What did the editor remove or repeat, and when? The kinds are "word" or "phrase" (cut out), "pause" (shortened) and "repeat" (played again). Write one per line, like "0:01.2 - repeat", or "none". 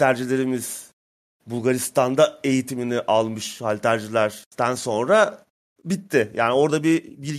none